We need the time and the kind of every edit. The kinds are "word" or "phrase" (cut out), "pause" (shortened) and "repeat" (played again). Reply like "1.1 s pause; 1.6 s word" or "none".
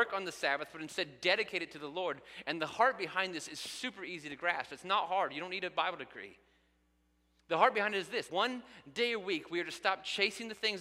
8.3 s word

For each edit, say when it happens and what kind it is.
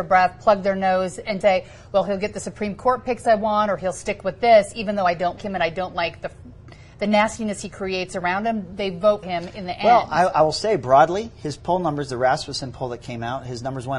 1.4 s word; 5.4 s word; 9.2 s word

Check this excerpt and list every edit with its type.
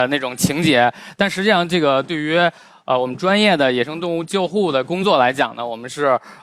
none

